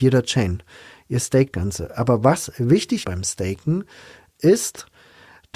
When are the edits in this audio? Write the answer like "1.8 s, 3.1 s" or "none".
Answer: 1.5 s, 3.0 s